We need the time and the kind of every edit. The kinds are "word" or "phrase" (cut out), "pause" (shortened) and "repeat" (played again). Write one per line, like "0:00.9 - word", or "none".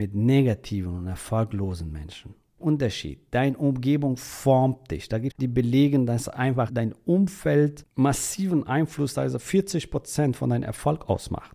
0:02.6 - phrase
0:05.3 - phrase
0:06.7 - word